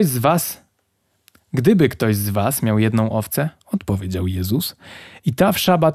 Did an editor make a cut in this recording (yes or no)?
no